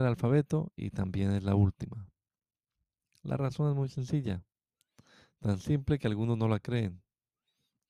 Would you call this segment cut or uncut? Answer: uncut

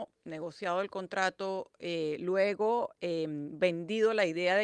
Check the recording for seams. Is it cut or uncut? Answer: uncut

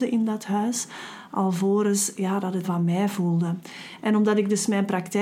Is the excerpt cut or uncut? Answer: cut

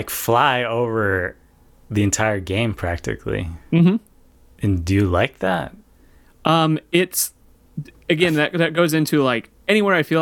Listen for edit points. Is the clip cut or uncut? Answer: uncut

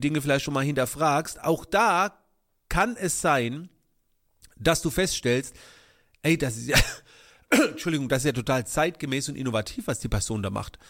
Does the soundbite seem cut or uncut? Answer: uncut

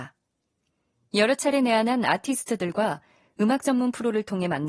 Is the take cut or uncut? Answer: uncut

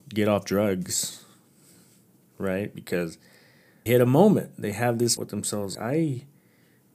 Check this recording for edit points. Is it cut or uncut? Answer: cut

